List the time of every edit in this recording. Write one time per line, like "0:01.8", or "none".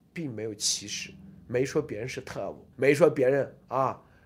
0:02.7